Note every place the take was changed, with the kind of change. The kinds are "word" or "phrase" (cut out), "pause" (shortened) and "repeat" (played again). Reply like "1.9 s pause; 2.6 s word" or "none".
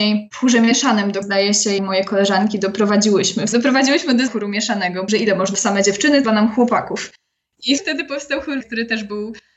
1.2 s word; 1.8 s word; 3.5 s word; 4.3 s word; 5.1 s word; 5.6 s word; 6.2 s word; 7.8 s word; 8.6 s word